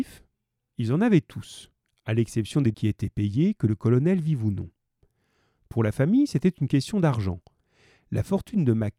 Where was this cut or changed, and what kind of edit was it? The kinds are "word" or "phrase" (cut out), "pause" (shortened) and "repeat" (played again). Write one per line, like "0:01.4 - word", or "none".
0:02.7 - word